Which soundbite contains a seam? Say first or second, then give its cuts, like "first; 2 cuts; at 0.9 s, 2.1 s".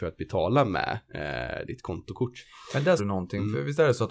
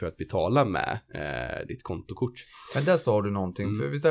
first; 1 cut; at 3.0 s